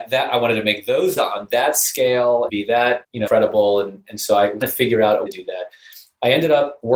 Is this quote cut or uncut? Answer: cut